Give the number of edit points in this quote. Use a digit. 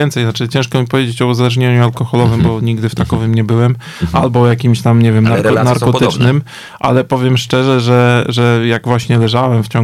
0